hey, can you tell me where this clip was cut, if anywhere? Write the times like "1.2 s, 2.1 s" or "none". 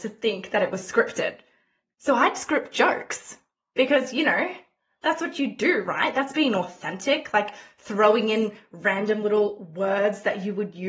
none